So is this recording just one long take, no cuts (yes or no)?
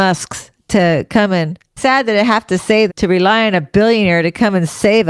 no